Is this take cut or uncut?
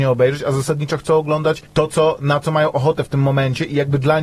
cut